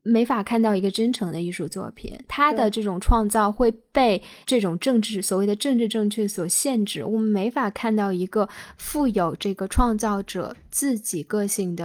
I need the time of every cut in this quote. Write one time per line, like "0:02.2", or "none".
0:04.4